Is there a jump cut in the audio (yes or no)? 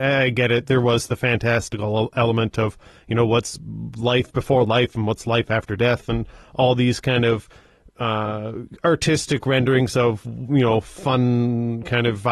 no